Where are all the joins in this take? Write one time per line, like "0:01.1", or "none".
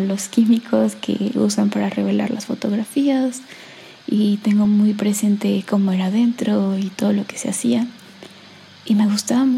none